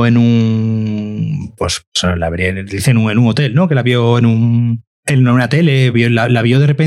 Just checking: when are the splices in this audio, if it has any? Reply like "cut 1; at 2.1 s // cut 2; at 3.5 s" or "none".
cut 1; at 4.9 s // cut 2; at 5.9 s